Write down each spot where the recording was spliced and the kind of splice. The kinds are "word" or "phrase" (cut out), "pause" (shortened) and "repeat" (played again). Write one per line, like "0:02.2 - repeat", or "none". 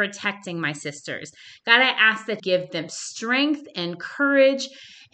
0:02.4 - word